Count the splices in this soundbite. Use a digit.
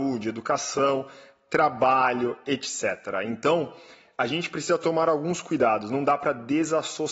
0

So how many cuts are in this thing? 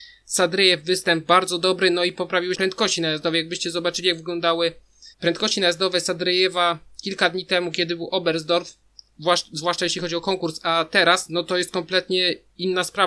2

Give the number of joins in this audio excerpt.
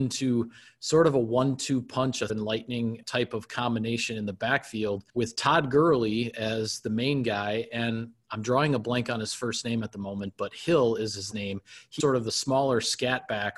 5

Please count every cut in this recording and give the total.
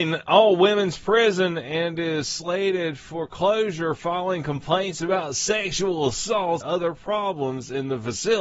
1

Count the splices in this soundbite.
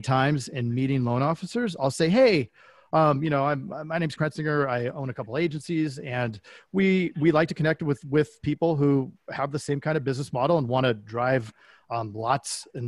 1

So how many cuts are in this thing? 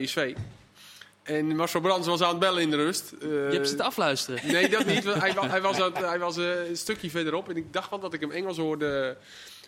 1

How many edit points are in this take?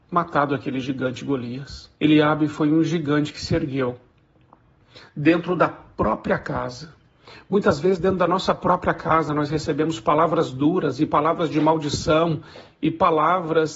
1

